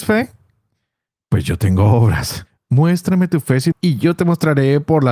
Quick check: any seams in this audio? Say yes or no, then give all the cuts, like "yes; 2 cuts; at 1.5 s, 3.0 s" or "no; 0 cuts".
yes; 1 cut; at 3.7 s